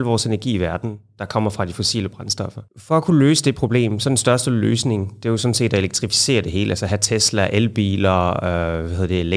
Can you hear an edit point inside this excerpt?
yes; 1 cut; at 2.7 s

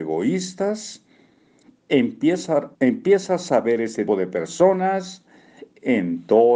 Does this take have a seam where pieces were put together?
yes; 2 cuts; at 2.7 s, 4.1 s

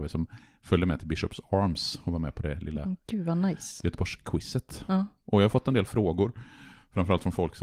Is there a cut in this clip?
no; 0 cuts

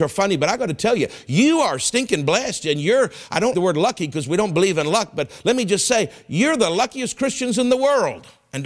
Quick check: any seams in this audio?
yes; 1 cut; at 3.5 s

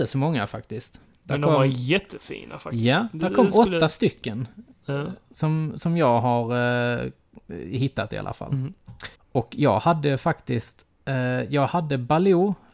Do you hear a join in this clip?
yes; 2 cuts; at 9.2 s, 10.9 s

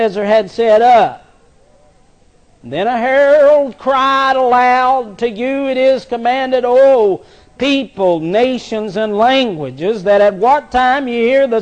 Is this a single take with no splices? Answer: yes; 0 cuts

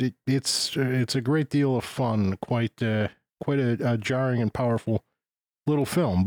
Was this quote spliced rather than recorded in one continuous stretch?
no; 0 cuts

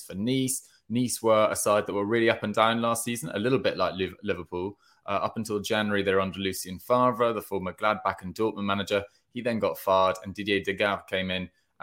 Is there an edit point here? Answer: no; 0 cuts

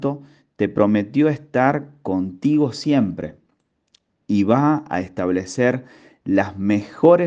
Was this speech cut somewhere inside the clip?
no; 0 cuts

